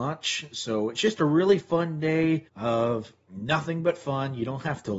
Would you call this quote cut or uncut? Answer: cut